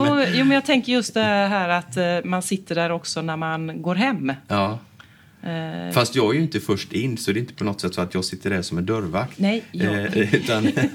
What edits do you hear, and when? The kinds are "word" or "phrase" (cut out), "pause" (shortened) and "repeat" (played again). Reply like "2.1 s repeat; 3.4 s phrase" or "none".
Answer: none